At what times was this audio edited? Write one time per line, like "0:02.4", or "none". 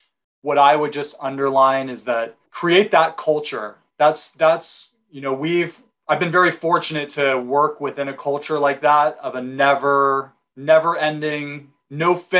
0:02.4